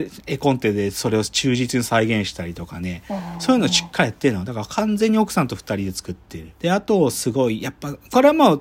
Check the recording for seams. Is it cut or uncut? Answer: cut